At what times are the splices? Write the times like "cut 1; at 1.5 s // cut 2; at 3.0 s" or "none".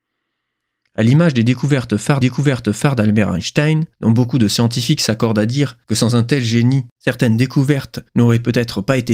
cut 1; at 2.2 s // cut 2; at 3.9 s // cut 3; at 5.8 s // cut 4; at 8.1 s

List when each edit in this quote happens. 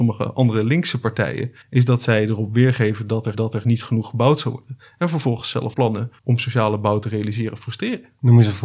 cut 1; at 1.6 s // cut 2; at 3.3 s // cut 3; at 5.7 s // cut 4; at 6.2 s

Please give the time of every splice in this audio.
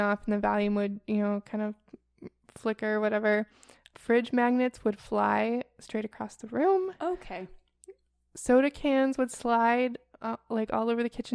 none

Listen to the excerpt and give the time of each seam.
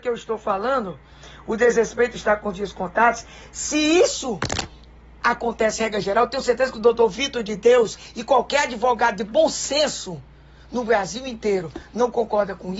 none

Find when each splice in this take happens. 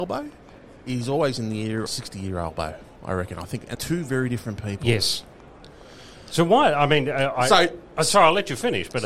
cut 1; at 1.9 s // cut 2; at 3.7 s

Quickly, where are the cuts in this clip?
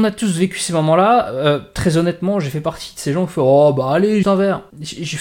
cut 1; at 4.2 s

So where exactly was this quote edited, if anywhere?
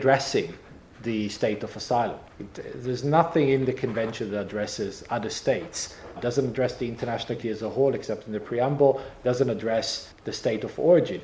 cut 1; at 2.3 s // cut 2; at 6.2 s // cut 3; at 7.4 s // cut 4; at 10.1 s

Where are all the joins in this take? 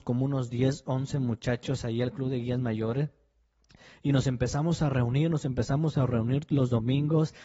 none

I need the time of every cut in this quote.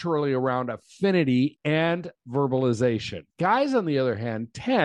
cut 1; at 3.3 s

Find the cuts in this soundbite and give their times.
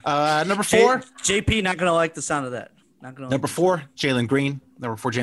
none

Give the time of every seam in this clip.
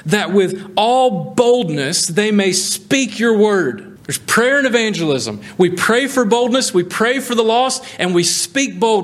cut 1; at 4.0 s

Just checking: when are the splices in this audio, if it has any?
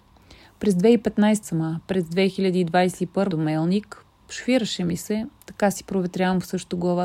cut 1; at 1.4 s // cut 2; at 3.3 s

